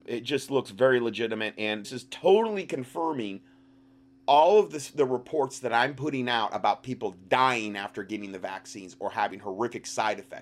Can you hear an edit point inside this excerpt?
yes; 1 cut; at 1.8 s

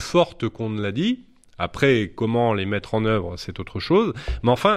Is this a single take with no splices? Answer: yes; 0 cuts

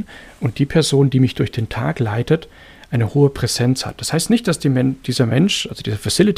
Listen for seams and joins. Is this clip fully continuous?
yes; 0 cuts

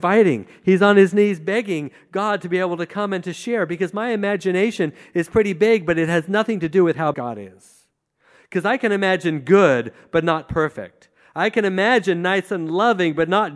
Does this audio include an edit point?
yes; 1 cut; at 7.1 s

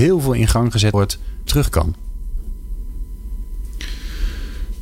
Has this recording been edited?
yes; 2 cuts; at 0.9 s, 1.5 s

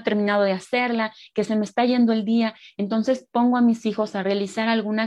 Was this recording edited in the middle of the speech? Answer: no; 0 cuts

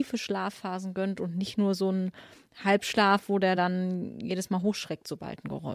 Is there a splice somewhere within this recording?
no; 0 cuts

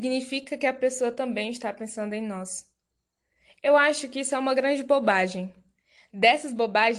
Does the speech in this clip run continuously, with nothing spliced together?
yes; 0 cuts

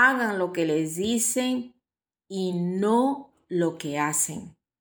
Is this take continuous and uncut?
yes; 0 cuts

